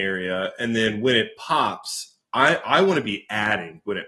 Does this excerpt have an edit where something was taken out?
no; 0 cuts

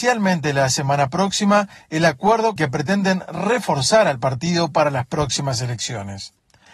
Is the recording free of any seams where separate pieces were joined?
no; 1 cut; at 2.6 s

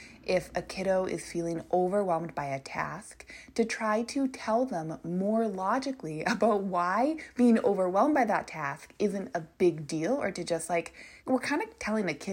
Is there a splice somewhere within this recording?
yes; 2 cuts; at 9.5 s, 11.2 s

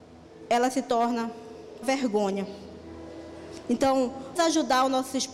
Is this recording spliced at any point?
yes; 2 cuts; at 1.8 s, 4.4 s

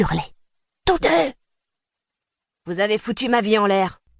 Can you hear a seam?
yes; 1 cut; at 1.0 s

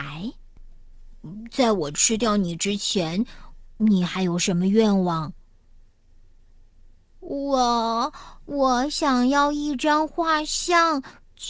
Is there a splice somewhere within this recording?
no; 0 cuts

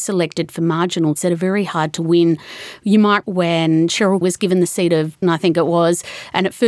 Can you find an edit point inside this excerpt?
yes; 4 cuts; at 1.1 s, 3.2 s, 4.2 s, 5.2 s

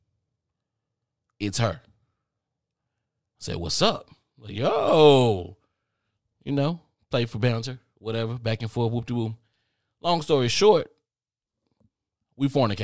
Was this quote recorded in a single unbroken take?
yes; 0 cuts

